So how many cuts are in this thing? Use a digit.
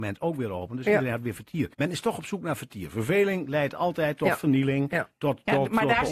1